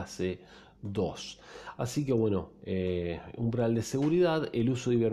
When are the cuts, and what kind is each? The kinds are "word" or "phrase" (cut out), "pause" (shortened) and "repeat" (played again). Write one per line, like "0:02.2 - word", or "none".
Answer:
none